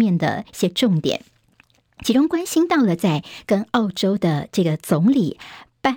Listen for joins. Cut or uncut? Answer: uncut